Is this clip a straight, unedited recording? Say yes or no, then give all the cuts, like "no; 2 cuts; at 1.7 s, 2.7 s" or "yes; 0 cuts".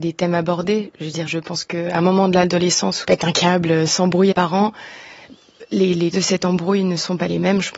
no; 4 cuts; at 1.3 s, 3.0 s, 4.3 s, 6.1 s